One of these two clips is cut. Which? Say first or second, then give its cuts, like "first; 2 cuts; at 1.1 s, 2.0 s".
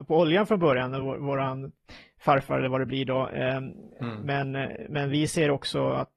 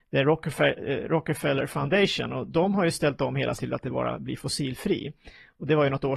second; 1 cut; at 3.5 s